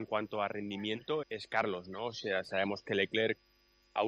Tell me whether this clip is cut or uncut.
cut